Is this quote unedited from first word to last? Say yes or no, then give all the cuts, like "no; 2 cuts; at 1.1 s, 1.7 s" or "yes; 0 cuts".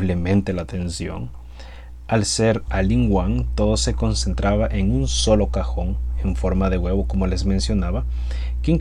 yes; 0 cuts